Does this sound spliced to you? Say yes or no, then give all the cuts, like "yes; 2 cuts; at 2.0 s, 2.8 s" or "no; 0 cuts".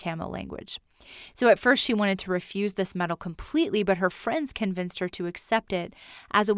no; 0 cuts